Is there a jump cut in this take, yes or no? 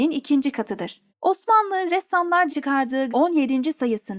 yes